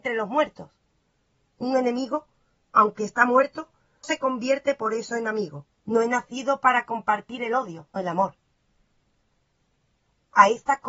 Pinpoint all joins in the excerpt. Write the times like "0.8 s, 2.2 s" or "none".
4.0 s, 5.8 s, 8.0 s